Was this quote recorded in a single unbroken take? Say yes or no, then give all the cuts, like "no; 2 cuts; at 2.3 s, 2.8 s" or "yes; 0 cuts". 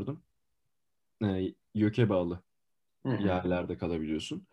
no; 1 cut; at 2.7 s